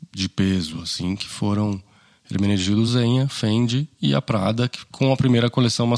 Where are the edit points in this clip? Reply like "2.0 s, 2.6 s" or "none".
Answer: none